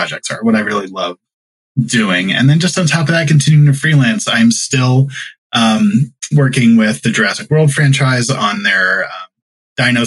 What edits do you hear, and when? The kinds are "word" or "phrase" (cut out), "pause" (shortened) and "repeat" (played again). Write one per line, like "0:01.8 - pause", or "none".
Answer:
none